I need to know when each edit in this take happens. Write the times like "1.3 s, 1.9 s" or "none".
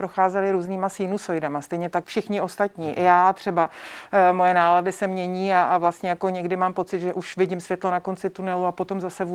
2.0 s